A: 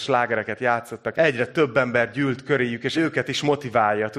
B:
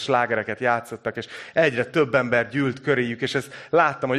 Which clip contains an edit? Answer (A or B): A